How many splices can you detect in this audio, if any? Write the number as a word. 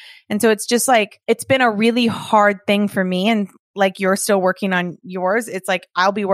one